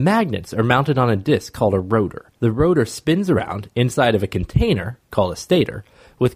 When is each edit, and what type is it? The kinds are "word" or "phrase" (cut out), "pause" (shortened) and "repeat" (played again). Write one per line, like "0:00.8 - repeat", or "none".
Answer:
0:02.4 - pause